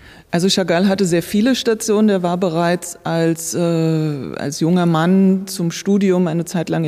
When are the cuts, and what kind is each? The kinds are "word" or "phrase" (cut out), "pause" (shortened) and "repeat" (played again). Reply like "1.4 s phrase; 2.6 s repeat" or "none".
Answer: none

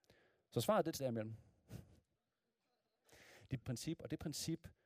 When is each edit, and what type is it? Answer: 1.0 s word; 3.6 s word

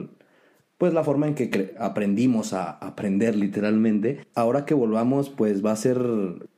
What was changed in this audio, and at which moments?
4.3 s word

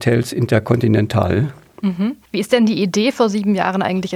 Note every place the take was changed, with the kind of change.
2.2 s pause

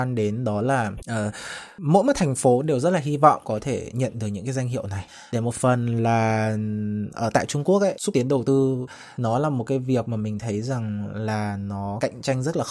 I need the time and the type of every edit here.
8.0 s phrase

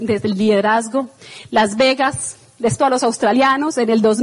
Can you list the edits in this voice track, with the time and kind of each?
2.8 s word

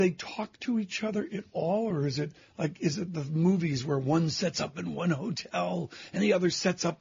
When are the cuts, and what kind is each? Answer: none

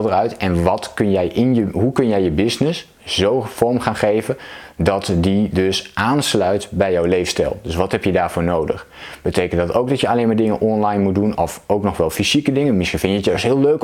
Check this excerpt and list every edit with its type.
3.0 s pause

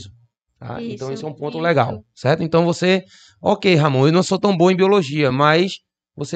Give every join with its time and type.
none

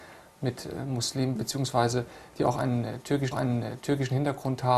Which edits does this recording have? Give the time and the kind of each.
1.3 s word; 3.3 s repeat

